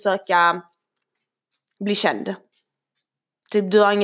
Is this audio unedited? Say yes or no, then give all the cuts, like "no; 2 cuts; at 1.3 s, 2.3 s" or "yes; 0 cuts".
yes; 0 cuts